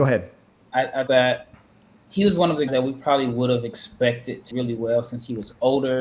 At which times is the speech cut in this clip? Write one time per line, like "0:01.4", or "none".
0:01.1
0:02.7
0:04.5